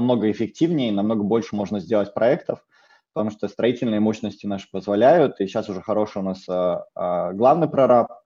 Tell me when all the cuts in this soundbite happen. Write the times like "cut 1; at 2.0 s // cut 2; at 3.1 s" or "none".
none